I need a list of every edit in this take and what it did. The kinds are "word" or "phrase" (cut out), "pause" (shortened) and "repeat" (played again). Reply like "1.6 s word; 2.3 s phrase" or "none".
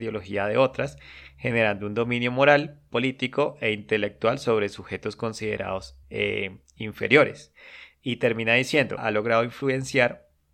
6.0 s pause; 9.0 s phrase